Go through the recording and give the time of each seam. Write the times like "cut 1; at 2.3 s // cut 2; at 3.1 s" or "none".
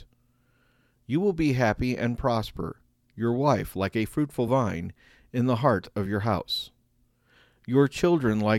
none